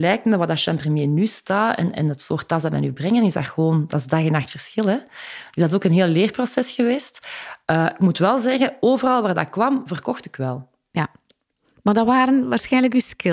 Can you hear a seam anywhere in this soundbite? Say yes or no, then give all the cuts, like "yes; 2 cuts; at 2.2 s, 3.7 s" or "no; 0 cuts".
no; 0 cuts